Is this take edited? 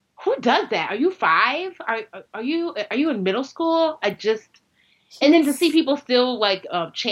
no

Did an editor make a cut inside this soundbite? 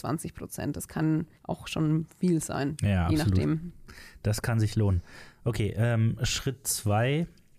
yes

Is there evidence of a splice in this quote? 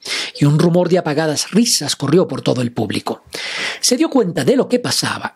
no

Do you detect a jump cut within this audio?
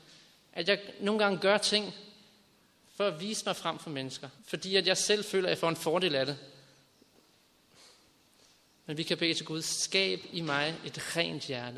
yes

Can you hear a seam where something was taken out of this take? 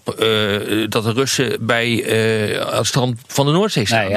no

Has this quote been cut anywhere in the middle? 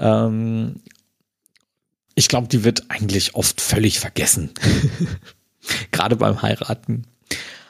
no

